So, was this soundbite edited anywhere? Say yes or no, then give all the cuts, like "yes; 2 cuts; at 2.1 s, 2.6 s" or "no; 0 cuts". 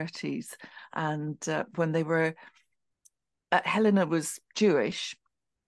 no; 0 cuts